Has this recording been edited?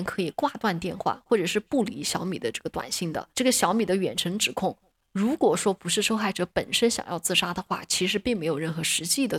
yes; 1 cut; at 3.3 s

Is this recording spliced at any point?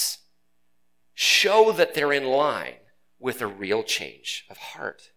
no; 0 cuts

